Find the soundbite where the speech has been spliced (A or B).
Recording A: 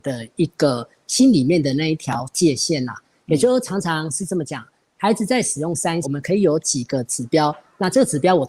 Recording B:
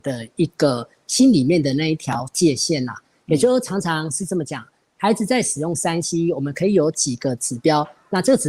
A